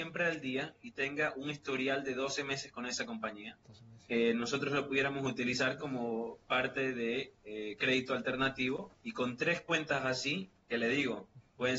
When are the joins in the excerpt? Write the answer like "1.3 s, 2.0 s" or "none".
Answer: 8.9 s